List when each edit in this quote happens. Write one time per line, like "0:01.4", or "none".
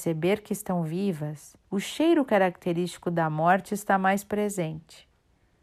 0:01.6